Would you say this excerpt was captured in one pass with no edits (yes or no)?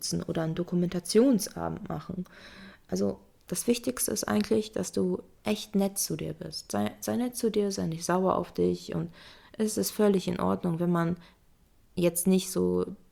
yes